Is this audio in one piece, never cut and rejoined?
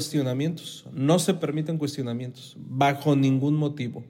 yes; 0 cuts

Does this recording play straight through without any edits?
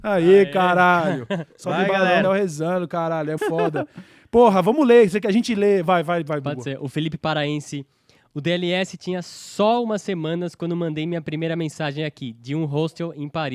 no; 2 cuts; at 2.2 s, 3.4 s

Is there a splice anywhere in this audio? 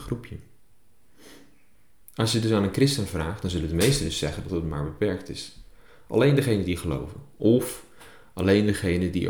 no; 0 cuts

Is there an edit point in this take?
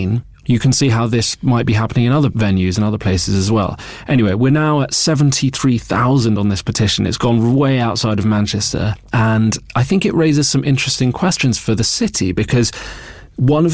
no; 0 cuts

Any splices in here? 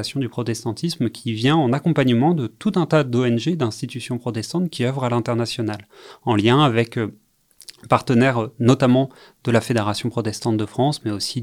no; 0 cuts

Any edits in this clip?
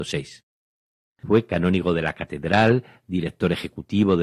no; 0 cuts

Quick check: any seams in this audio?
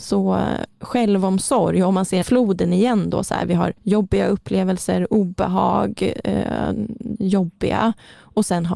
yes; 3 cuts; at 2.2 s, 3.8 s, 7.2 s

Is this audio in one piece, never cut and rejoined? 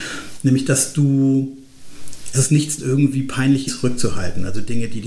no; 3 cuts; at 2.3 s, 2.8 s, 3.7 s

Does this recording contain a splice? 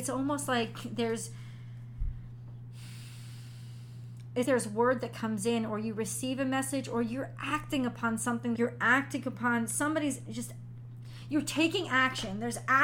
yes; 2 cuts; at 4.4 s, 8.5 s

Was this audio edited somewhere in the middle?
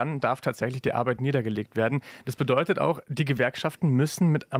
no; 0 cuts

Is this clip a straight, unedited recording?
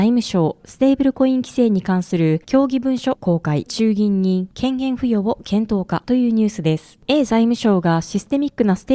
no; 1 cut; at 3.7 s

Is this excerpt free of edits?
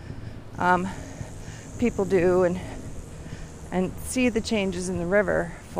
no; 1 cut; at 1.7 s

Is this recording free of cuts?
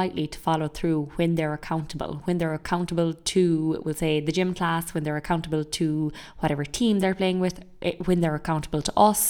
yes; 0 cuts

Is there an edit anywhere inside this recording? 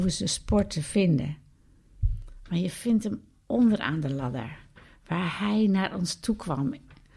no; 0 cuts

